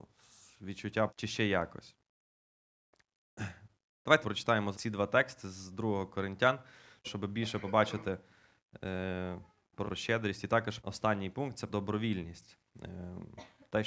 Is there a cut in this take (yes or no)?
yes